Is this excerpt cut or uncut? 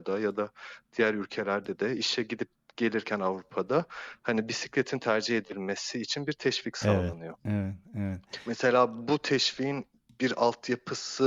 uncut